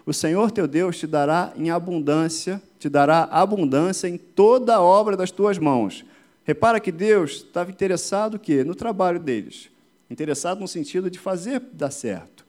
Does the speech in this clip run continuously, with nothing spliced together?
yes; 0 cuts

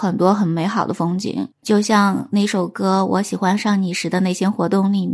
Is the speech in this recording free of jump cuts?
no; 1 cut; at 1.6 s

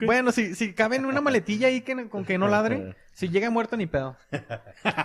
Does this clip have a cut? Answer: no; 0 cuts

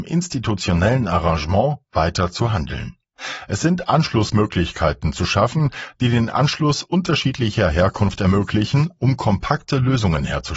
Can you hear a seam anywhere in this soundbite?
no; 0 cuts

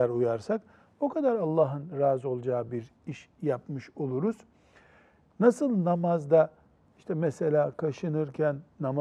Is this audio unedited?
yes; 0 cuts

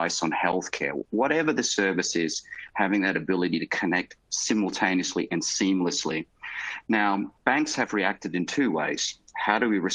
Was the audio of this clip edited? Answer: yes; 2 cuts; at 4.2 s, 7.4 s

